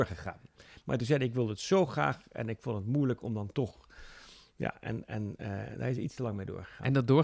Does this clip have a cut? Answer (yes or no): no